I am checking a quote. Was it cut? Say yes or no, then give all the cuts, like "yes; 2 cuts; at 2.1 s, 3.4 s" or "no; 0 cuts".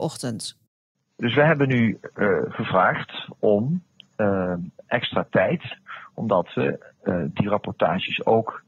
no; 0 cuts